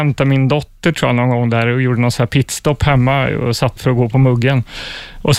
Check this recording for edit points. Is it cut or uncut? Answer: cut